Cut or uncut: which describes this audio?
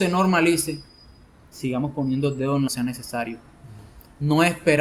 cut